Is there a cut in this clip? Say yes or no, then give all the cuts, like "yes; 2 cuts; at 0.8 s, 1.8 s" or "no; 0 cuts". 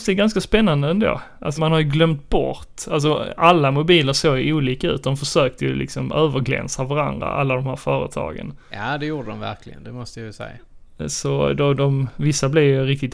yes; 1 cut; at 1.6 s